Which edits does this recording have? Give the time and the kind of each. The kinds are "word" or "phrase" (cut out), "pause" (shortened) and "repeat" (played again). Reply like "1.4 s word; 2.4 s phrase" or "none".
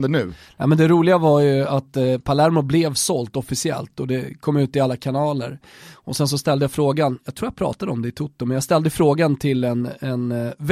none